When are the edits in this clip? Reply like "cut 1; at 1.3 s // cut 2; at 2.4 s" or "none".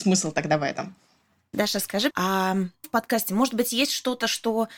cut 1; at 2.1 s // cut 2; at 2.8 s